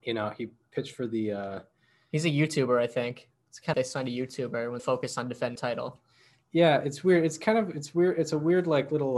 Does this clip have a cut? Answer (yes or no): yes